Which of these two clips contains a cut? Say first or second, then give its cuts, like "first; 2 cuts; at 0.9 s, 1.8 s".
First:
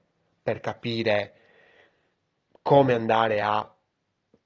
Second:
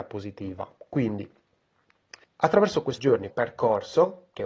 second; 3 cuts; at 2.2 s, 3.0 s, 3.3 s